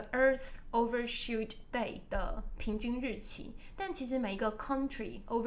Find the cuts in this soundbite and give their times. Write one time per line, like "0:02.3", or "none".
none